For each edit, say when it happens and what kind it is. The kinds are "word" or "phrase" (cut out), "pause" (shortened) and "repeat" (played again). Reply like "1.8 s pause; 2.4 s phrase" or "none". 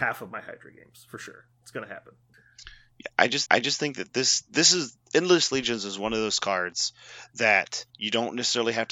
1.5 s pause; 3.5 s repeat; 7.9 s pause